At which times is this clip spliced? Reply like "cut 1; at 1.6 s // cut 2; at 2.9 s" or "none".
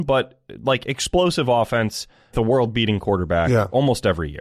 cut 1; at 2.3 s